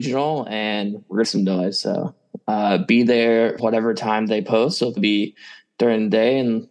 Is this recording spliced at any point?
yes; 3 cuts; at 1.2 s, 3.6 s, 5.0 s

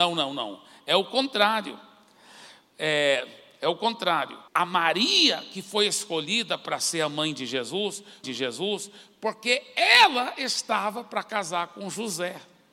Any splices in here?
yes; 2 cuts; at 4.5 s, 8.2 s

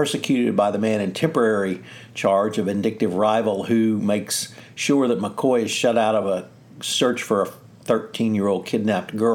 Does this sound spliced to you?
no; 0 cuts

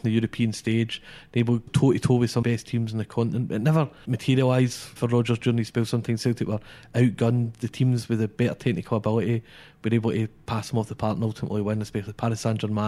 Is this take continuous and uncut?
no; 4 cuts; at 1.7 s, 2.4 s, 4.0 s, 5.0 s

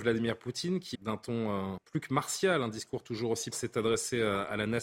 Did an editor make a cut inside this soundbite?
yes; 3 cuts; at 0.9 s, 1.8 s, 3.5 s

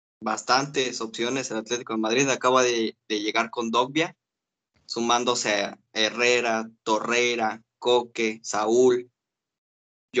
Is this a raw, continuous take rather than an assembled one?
yes; 0 cuts

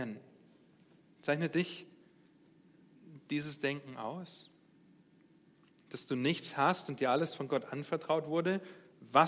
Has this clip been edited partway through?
no; 0 cuts

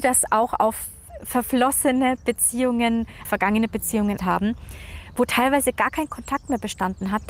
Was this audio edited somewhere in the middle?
yes; 2 cuts; at 3.2 s, 4.2 s

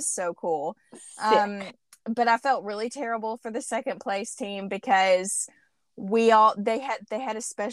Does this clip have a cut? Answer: no; 0 cuts

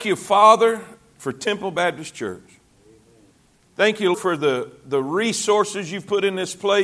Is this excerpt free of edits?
no; 1 cut; at 4.1 s

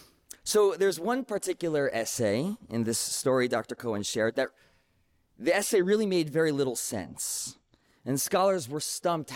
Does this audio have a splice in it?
no; 0 cuts

